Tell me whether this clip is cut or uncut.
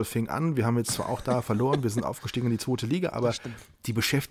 uncut